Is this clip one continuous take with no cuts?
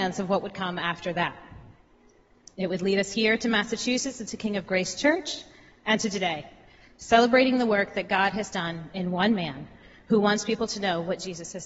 yes; 0 cuts

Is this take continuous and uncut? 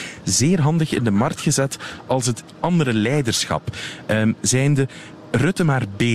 yes; 0 cuts

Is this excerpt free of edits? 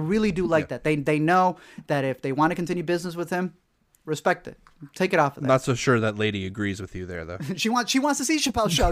yes; 0 cuts

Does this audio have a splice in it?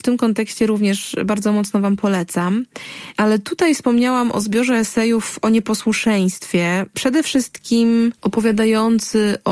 yes; 1 cut; at 8.2 s

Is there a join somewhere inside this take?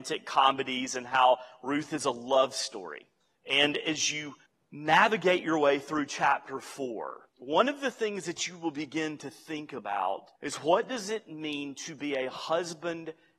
yes; 4 cuts; at 3.2 s, 4.5 s, 7.3 s, 10.4 s

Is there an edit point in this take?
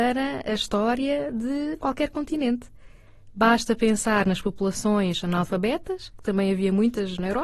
no; 0 cuts

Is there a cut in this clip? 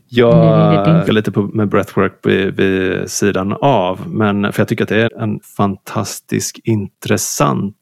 yes; 3 cuts; at 1.1 s, 5.1 s, 5.4 s

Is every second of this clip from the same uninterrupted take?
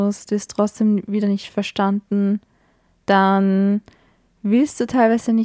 yes; 0 cuts

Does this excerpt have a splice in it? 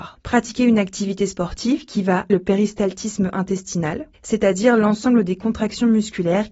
yes; 1 cut; at 2.3 s

